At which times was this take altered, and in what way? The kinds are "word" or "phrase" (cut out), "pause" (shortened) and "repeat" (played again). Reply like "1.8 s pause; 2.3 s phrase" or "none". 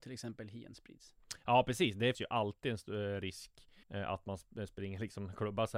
2.1 s word; 3.8 s pause